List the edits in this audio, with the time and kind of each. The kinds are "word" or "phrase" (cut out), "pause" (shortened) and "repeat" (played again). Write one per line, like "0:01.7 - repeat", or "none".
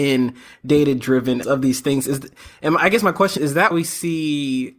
0:01.4 - word
0:03.4 - word
0:03.7 - word

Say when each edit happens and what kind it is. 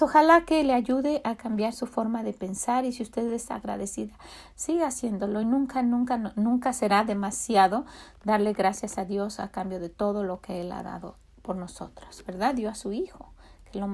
none

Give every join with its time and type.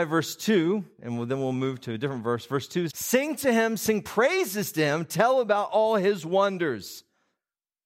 0:02.9 - word

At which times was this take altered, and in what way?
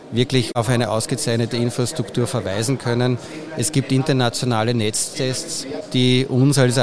none

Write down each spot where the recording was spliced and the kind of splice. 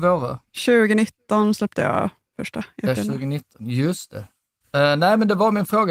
none

